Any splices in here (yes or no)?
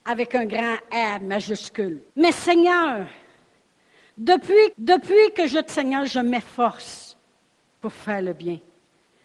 yes